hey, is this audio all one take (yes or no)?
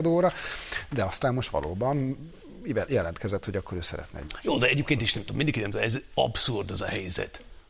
yes